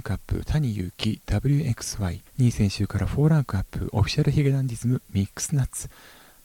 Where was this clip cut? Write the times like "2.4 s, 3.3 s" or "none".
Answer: 2.3 s